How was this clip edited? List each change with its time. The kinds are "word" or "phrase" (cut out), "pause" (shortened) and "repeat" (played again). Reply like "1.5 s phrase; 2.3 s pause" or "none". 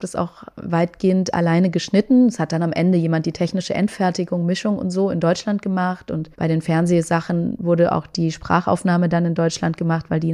6.3 s pause